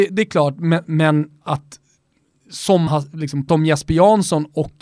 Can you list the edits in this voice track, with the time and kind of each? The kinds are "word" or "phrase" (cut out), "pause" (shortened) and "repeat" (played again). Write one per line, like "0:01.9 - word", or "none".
0:02.9 - word
0:03.5 - word